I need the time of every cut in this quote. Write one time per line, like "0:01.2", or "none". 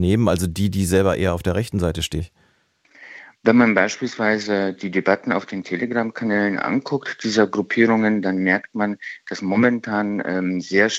0:02.2